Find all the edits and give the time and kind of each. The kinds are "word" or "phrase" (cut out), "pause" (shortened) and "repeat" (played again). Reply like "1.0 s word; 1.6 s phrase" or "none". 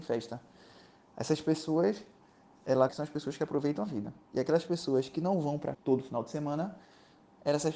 2.9 s word; 5.7 s word